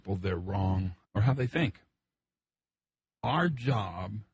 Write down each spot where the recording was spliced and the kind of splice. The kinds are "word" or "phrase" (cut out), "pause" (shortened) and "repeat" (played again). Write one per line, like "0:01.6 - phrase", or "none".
0:01.0 - phrase